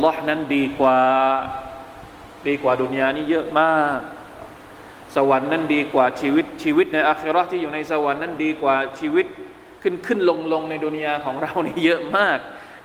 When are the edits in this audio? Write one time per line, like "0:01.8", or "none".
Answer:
0:09.8